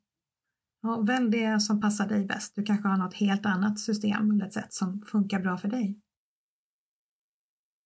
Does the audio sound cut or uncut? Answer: uncut